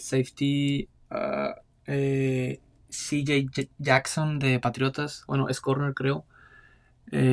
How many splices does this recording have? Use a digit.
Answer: 0